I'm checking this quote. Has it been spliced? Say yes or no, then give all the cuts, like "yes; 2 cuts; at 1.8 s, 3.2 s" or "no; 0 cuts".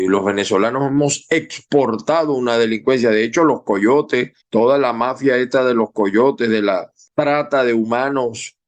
yes; 2 cuts; at 4.4 s, 7.1 s